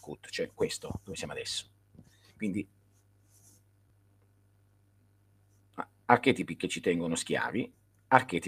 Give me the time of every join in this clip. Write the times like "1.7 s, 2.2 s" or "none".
none